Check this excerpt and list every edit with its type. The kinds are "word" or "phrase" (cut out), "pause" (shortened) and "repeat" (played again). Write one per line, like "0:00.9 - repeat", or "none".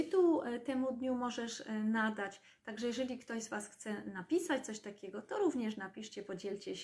none